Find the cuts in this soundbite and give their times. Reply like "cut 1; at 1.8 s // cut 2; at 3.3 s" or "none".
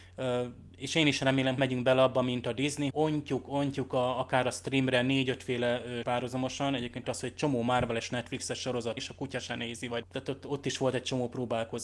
cut 1; at 1.6 s // cut 2; at 2.9 s // cut 3; at 6.0 s // cut 4; at 7.0 s // cut 5; at 9.0 s // cut 6; at 10.0 s